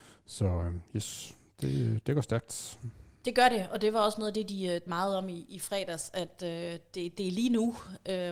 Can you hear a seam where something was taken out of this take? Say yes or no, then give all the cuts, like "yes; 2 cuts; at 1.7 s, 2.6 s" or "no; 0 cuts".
yes; 1 cut; at 4.9 s